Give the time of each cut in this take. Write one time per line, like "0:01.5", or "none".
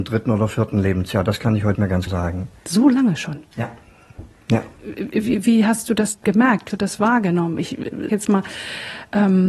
0:01.7
0:02.1
0:05.4
0:06.1
0:06.7
0:08.1